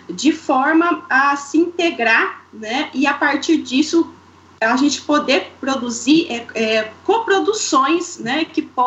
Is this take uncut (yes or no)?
yes